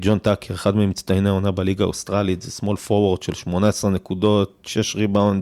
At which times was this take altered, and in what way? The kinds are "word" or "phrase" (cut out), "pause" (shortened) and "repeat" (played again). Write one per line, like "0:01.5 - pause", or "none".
none